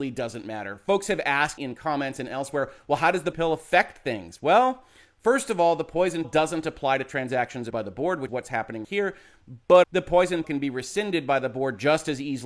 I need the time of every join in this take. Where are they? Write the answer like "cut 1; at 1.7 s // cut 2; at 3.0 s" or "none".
cut 1; at 1.6 s // cut 2; at 3.3 s // cut 3; at 6.2 s // cut 4; at 7.7 s // cut 5; at 8.3 s // cut 6; at 8.8 s // cut 7; at 9.8 s // cut 8; at 10.4 s